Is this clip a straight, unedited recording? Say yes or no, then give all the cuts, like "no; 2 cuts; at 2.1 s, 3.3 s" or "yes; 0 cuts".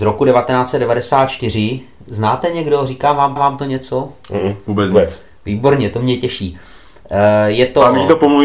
no; 1 cut; at 3.4 s